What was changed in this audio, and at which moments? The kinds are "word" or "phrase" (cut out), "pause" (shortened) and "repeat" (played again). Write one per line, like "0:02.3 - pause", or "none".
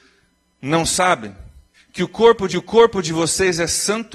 0:01.7 - pause
0:02.5 - repeat